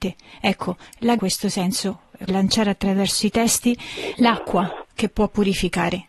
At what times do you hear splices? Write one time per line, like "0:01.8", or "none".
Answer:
0:01.2
0:02.3
0:04.1

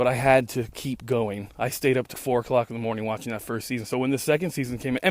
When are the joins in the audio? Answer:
0:02.1

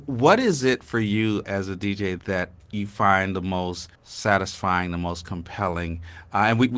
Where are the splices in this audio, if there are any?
0:01.4
0:02.2
0:04.0

